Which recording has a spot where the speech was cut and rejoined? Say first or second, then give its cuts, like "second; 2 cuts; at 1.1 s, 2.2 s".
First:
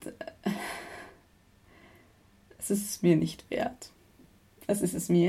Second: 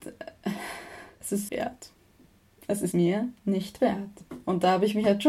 second; 4 cuts; at 1.1 s, 1.5 s, 2.9 s, 3.4 s